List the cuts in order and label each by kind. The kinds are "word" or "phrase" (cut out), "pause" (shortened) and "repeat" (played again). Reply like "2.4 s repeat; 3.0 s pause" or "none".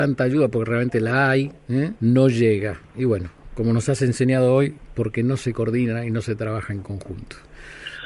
2.0 s pause